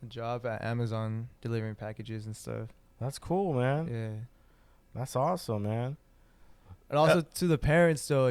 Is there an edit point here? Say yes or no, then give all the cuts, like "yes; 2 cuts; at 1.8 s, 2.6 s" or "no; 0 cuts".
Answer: yes; 1 cut; at 1.4 s